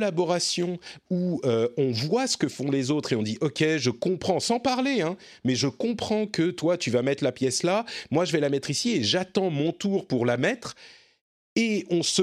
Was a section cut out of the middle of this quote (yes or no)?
no